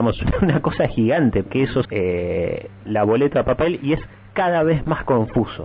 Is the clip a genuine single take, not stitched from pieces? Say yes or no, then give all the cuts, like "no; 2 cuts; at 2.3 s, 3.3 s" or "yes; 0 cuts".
no; 4 cuts; at 1.5 s, 1.8 s, 2.9 s, 3.3 s